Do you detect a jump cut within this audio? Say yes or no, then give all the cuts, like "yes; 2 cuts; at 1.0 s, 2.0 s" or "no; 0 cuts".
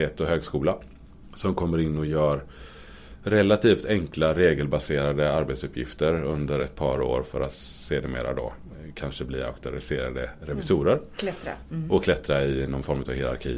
no; 0 cuts